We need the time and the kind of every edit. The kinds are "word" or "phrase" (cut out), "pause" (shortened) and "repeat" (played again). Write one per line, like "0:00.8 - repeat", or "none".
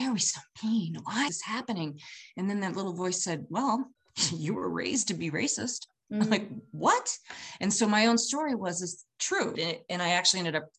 0:01.3 - word
0:03.9 - pause
0:09.5 - word